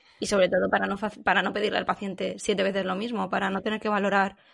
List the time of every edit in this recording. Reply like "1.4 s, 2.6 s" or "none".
none